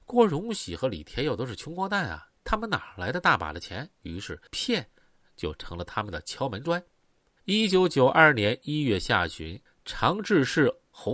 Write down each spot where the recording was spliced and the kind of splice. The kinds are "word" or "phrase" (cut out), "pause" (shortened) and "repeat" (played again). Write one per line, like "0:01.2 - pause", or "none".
0:02.4 - pause
0:03.9 - pause
0:04.5 - pause
0:07.2 - pause
0:09.7 - pause